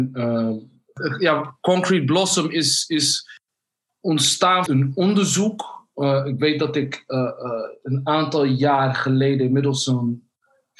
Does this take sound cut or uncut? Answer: cut